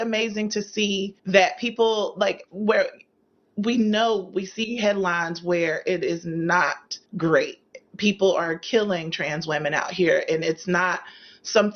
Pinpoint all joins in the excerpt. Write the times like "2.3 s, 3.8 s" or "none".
1.2 s, 7.1 s

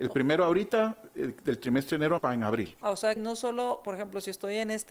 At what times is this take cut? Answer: 2.2 s, 2.8 s, 3.2 s

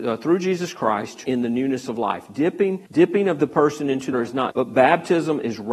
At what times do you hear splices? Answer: 1.2 s, 2.9 s, 4.1 s, 4.5 s

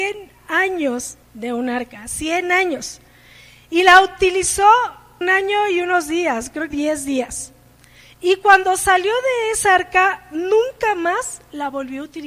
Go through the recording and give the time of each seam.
1.2 s, 5.2 s, 6.7 s

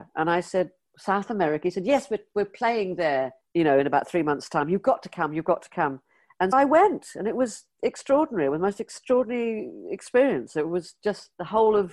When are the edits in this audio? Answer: 6.5 s

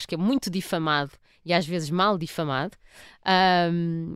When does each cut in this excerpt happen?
none

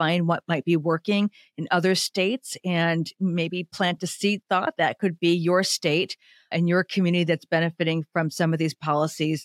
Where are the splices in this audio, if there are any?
none

